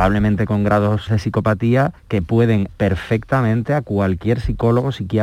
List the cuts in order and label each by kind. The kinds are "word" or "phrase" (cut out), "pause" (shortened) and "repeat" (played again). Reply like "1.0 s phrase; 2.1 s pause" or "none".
1.1 s word; 2.0 s pause; 2.7 s word